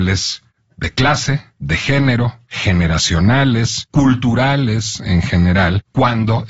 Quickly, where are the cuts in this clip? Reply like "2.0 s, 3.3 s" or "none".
1.5 s, 2.4 s